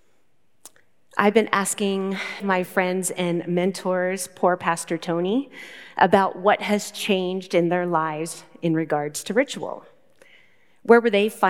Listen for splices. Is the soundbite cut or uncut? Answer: cut